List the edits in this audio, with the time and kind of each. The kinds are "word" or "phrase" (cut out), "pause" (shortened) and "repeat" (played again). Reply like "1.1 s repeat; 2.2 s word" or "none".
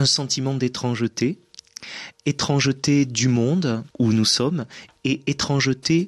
3.9 s pause